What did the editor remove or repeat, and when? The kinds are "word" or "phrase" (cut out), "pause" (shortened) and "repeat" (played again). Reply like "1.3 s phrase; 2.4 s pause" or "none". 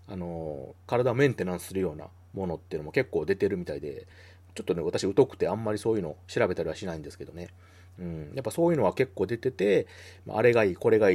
none